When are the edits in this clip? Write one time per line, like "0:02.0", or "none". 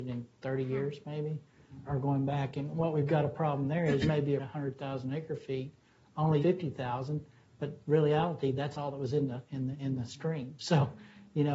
0:01.9
0:04.0
0:04.4
0:06.4